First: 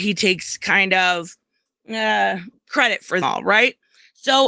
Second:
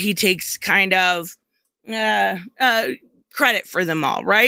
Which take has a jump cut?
first; 2 cuts; at 2.5 s, 3.2 s

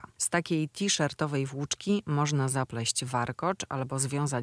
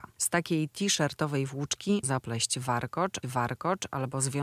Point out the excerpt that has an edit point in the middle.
second; 2 cuts; at 2.0 s, 3.2 s

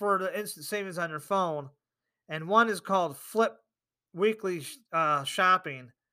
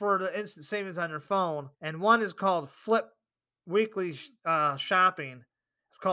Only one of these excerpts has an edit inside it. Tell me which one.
second; 1 cut; at 1.7 s

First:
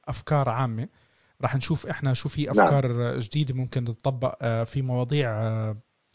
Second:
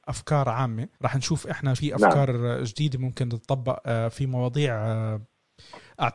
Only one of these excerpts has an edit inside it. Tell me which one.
second; 2 cuts; at 0.9 s, 1.7 s

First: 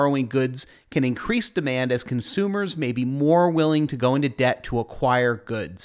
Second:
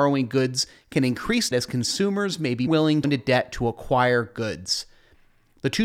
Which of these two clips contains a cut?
second; 3 cuts; at 1.5 s, 2.7 s, 3.0 s

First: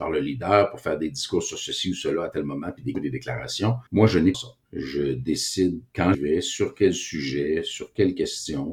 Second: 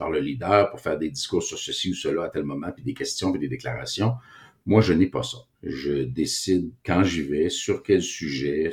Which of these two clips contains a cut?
first; 4 cuts; at 2.9 s, 3.9 s, 4.3 s, 6.1 s

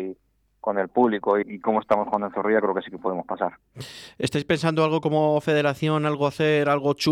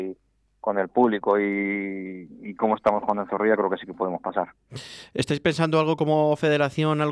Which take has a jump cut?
first; 1 cut; at 1.4 s

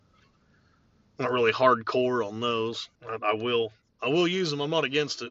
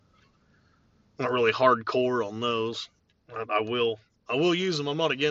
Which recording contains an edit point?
first; 1 cut; at 2.9 s

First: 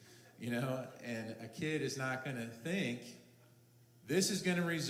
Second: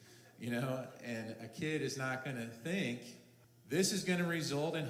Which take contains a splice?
second; 1 cut; at 3.4 s

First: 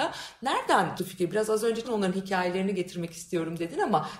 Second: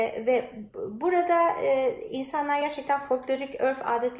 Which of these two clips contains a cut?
first; 2 cuts; at 1.0 s, 1.8 s

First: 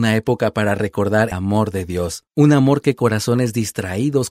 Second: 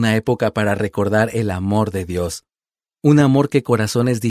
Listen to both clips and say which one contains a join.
first; 2 cuts; at 1.3 s, 2.3 s

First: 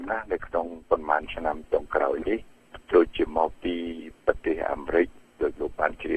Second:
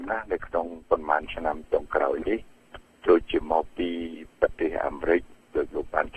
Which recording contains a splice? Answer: first; 1 cut; at 2.8 s

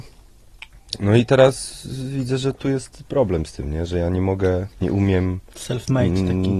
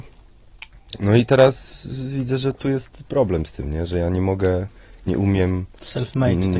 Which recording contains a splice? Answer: first; 1 cut; at 4.7 s

